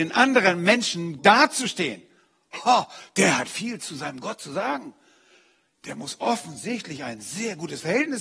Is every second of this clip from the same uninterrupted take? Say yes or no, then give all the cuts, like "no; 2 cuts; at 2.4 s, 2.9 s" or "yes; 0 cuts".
no; 1 cut; at 1.2 s